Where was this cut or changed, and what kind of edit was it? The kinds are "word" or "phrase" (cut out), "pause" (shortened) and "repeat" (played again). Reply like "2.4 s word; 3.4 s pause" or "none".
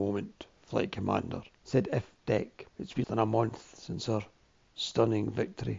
1.5 s pause; 2.7 s pause; 3.0 s word